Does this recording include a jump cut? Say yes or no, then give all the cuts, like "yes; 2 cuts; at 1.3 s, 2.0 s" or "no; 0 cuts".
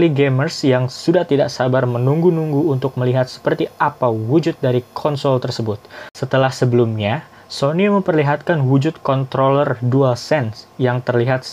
no; 0 cuts